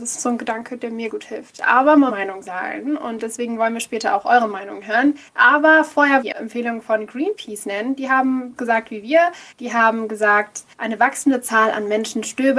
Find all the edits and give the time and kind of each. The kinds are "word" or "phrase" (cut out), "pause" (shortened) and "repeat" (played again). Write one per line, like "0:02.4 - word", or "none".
0:01.1 - word
0:02.1 - phrase
0:05.3 - pause
0:06.2 - phrase
0:08.6 - word
0:09.5 - pause
0:10.7 - pause